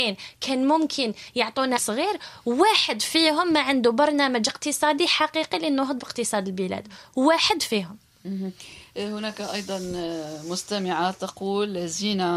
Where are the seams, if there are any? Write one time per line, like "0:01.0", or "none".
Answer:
0:01.8